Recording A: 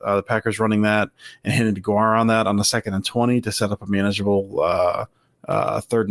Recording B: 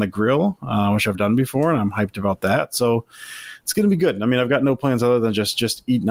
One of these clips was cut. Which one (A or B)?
B